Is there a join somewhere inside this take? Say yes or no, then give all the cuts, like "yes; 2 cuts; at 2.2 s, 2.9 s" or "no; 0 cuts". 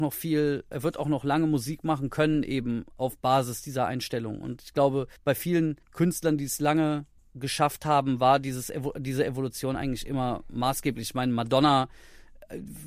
yes; 3 cuts; at 5.2 s, 5.8 s, 7.2 s